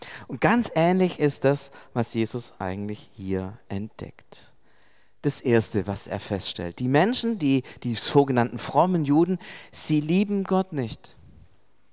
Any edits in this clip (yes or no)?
no